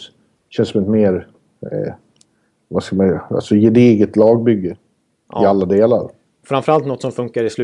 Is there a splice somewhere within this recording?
no; 0 cuts

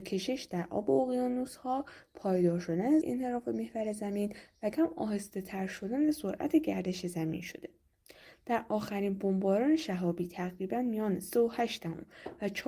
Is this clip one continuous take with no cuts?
no; 2 cuts; at 3.0 s, 4.7 s

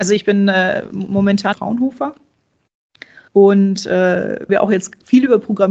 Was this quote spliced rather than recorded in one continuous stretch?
yes; 3 cuts; at 1.5 s, 3.3 s, 4.5 s

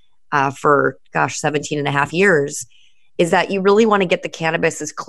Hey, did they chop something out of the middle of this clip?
no; 0 cuts

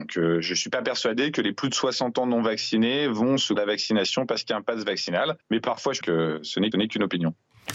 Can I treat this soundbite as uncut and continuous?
no; 4 cuts; at 3.6 s, 5.4 s, 6.0 s, 6.7 s

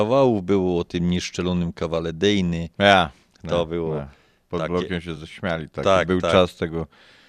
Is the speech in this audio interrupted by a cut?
no; 0 cuts

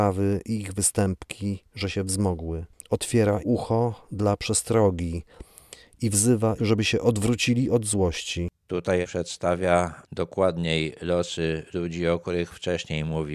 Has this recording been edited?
yes; 3 cuts; at 3.4 s, 6.6 s, 9.0 s

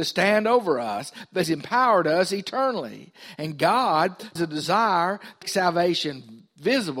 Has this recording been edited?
yes; 3 cuts; at 1.4 s, 4.4 s, 5.4 s

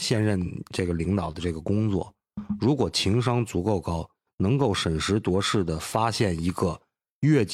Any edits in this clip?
no; 0 cuts

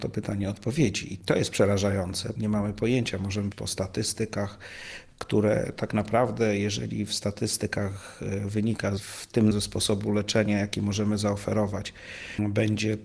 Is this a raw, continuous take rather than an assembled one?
no; 4 cuts; at 2.4 s, 3.5 s, 9.0 s, 9.5 s

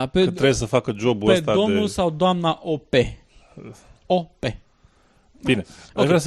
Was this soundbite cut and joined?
no; 0 cuts

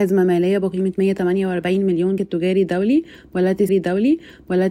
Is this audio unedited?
no; 2 cuts; at 2.2 s, 3.7 s

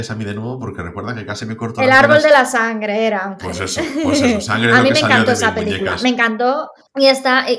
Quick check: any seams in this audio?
no; 0 cuts

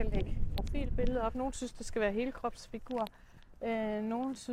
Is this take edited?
no; 0 cuts

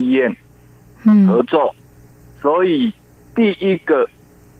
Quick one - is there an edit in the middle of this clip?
no; 0 cuts

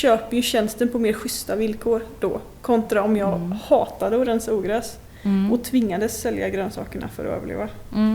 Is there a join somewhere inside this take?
no; 0 cuts

